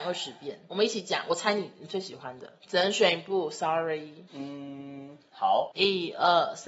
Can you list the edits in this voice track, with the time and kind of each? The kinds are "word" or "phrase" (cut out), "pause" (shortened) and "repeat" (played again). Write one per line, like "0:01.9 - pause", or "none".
none